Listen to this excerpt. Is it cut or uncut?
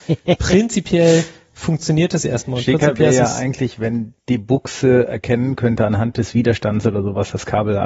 cut